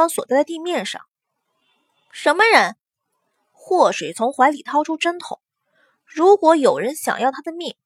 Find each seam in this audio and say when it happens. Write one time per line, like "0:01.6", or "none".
none